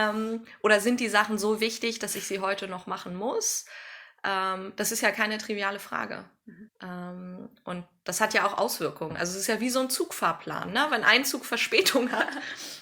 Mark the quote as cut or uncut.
cut